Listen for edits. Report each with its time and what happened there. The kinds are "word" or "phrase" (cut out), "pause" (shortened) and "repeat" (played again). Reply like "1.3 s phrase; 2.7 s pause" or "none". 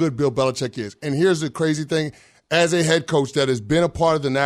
none